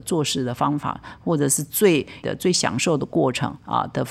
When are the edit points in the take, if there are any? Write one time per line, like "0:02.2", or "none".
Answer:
0:02.2